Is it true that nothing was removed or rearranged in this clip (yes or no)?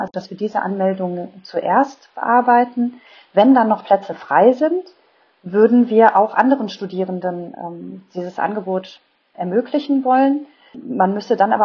yes